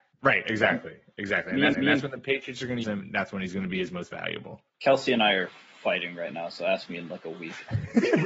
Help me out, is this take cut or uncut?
cut